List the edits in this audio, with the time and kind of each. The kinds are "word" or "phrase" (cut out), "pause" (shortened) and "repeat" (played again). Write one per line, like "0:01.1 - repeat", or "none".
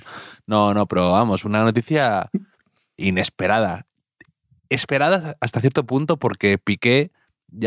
none